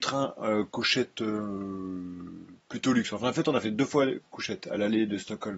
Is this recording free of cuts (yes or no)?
yes